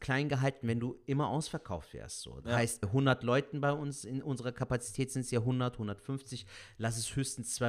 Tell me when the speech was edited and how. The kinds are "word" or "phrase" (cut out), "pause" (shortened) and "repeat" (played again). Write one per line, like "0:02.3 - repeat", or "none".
0:02.8 - word